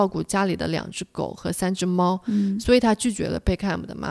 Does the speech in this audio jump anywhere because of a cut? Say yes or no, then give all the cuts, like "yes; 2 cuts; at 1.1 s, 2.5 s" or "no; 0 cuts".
no; 0 cuts